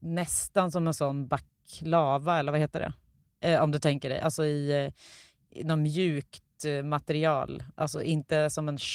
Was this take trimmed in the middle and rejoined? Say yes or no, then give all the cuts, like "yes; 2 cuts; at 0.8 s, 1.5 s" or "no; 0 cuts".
no; 0 cuts